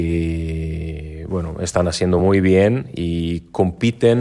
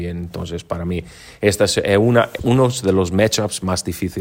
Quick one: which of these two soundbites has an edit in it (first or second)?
second